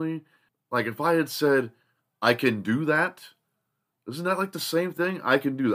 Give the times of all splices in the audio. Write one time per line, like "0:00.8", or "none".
none